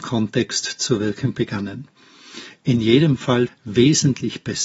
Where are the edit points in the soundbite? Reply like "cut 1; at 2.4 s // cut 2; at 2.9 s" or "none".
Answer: cut 1; at 3.5 s